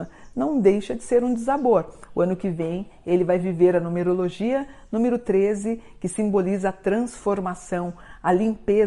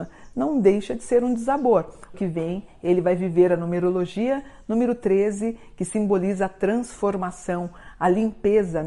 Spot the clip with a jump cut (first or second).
second